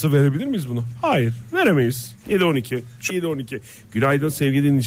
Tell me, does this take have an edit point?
yes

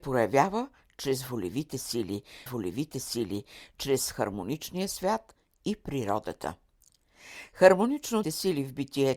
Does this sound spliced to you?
yes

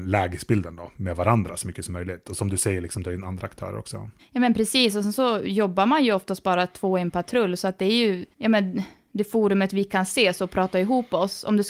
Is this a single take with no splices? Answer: no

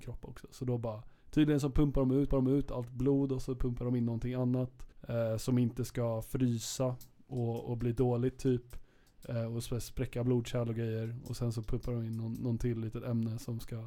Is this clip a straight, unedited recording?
no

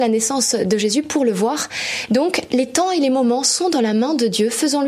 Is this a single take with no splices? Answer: yes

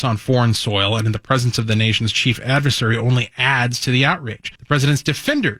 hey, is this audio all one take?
no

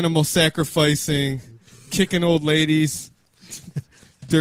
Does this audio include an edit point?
no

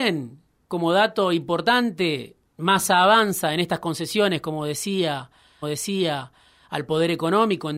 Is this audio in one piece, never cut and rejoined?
no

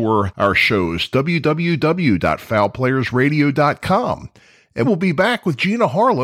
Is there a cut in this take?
yes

